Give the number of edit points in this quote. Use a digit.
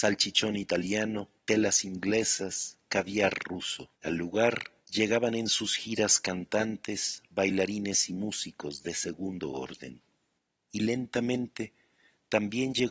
4